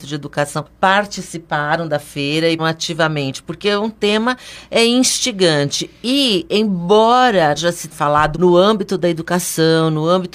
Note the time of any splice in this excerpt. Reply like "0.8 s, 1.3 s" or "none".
2.6 s, 7.6 s, 7.9 s, 8.3 s